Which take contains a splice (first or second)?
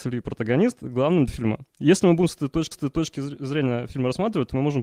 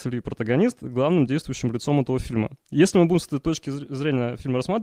first